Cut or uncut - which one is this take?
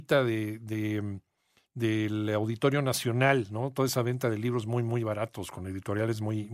uncut